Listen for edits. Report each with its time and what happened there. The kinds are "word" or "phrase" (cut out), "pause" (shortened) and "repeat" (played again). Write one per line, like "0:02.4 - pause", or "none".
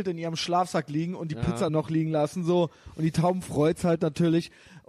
0:01.7 - word